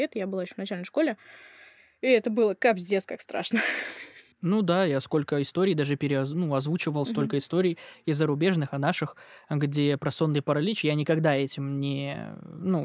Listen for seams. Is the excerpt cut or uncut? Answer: uncut